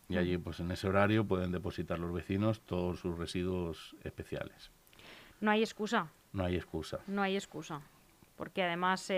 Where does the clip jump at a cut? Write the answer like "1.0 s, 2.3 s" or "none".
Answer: none